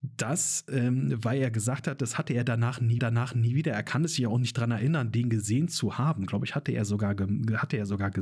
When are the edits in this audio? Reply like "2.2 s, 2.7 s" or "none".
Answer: 3.0 s